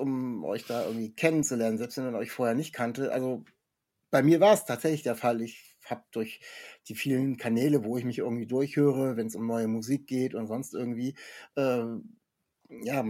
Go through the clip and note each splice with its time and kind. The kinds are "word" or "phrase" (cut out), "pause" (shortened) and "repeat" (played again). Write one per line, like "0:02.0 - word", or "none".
0:06.1 - pause